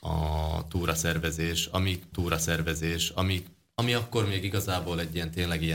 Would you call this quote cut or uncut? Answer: cut